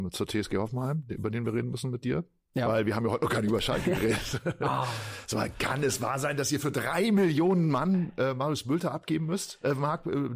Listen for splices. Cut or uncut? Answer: uncut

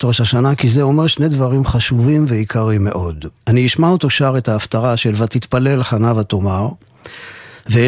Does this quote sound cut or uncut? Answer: cut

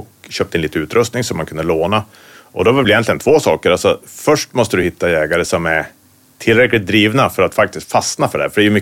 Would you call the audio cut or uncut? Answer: uncut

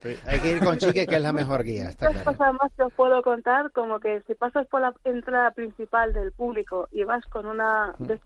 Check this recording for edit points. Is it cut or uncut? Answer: uncut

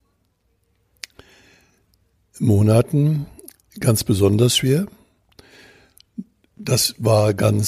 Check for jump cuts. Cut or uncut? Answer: uncut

